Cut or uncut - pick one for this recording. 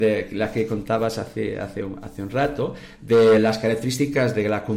uncut